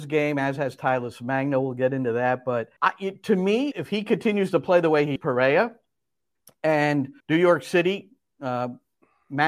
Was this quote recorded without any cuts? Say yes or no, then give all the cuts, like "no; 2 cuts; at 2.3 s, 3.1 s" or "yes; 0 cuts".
no; 4 cuts; at 2.8 s, 3.7 s, 5.2 s, 7.2 s